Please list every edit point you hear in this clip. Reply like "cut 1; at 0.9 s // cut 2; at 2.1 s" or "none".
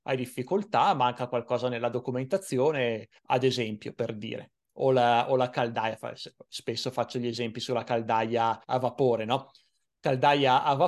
cut 1; at 3.2 s // cut 2; at 8.6 s